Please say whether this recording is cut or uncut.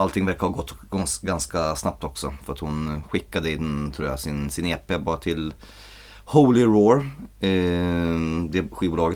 uncut